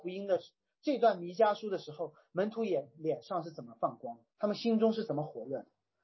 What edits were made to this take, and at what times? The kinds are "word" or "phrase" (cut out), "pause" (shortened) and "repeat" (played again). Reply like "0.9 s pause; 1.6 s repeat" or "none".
4.3 s pause